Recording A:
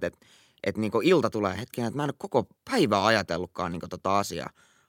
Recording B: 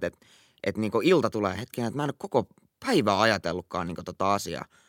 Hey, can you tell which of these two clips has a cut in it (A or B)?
A